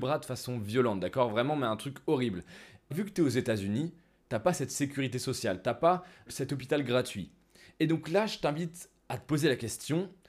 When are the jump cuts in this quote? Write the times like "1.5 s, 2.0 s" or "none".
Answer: 2.9 s, 6.3 s